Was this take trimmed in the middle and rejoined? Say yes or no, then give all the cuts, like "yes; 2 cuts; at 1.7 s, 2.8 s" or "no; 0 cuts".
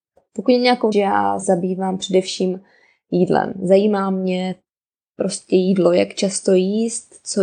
yes; 2 cuts; at 0.9 s, 1.4 s